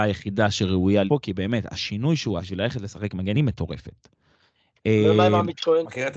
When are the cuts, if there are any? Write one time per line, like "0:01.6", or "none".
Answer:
0:01.1
0:02.4
0:03.3